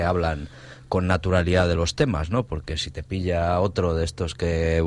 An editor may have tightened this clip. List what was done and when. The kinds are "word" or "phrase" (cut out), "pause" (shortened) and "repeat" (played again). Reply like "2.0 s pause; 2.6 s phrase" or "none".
none